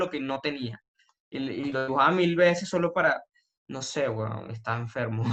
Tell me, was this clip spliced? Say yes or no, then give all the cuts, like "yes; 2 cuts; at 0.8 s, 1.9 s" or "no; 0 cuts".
no; 0 cuts